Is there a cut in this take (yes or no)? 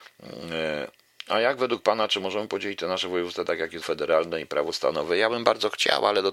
yes